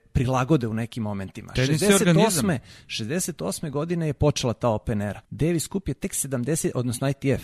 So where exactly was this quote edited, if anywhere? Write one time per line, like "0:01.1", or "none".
0:05.2